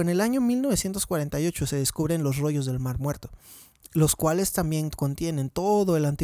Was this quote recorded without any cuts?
yes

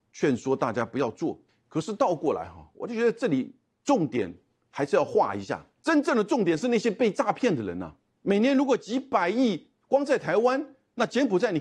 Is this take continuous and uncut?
yes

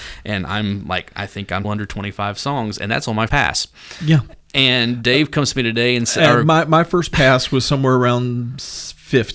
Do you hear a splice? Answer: yes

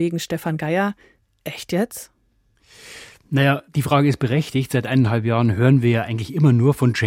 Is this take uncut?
yes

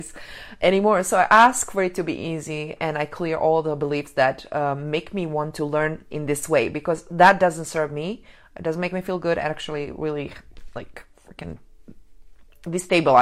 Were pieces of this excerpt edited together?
no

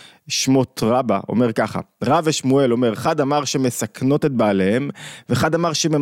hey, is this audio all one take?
yes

